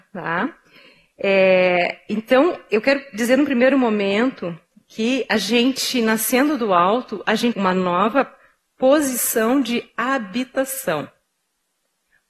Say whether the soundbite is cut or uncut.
cut